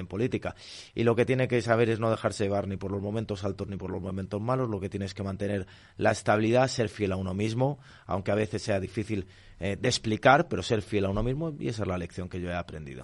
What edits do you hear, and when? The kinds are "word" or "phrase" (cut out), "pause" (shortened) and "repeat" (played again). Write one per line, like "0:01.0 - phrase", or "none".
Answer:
none